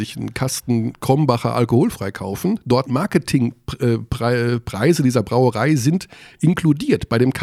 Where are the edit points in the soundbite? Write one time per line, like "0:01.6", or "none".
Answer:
0:02.9